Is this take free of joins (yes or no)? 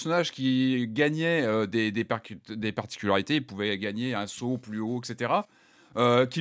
yes